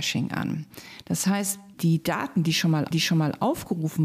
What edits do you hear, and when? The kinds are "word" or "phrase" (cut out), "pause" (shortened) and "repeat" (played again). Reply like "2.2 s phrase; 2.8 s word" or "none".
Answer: 1.7 s word; 2.9 s repeat